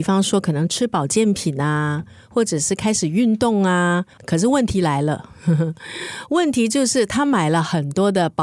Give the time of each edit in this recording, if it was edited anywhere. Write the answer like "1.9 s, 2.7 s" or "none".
4.1 s